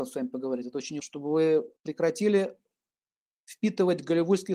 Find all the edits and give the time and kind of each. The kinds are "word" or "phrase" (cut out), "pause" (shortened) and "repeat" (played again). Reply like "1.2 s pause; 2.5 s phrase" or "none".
1.0 s word; 1.8 s pause